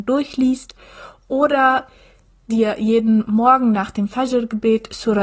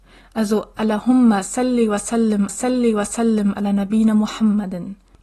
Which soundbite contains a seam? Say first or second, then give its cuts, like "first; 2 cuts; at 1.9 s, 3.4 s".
second; 1 cut; at 2.5 s